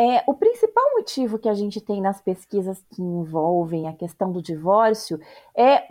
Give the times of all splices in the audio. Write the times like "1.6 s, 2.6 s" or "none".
none